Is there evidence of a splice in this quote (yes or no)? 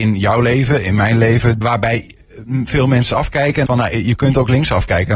yes